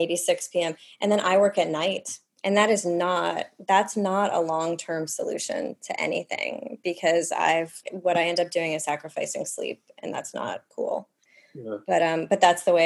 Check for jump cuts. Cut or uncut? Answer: cut